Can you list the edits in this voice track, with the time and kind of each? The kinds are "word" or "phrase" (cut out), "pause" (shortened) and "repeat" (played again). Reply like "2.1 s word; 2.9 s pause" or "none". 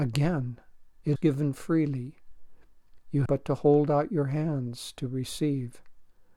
1.2 s word; 3.3 s word